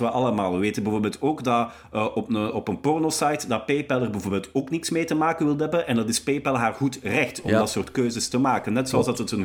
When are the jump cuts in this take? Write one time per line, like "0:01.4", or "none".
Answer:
none